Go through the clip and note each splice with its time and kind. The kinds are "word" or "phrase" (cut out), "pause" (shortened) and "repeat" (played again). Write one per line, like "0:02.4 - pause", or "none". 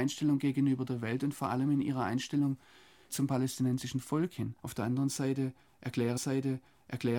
0:03.1 - word
0:04.6 - pause
0:06.2 - repeat